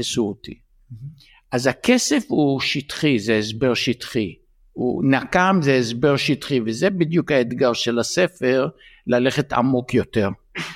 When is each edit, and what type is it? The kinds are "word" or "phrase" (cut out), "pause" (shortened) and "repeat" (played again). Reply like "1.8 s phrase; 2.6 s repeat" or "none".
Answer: none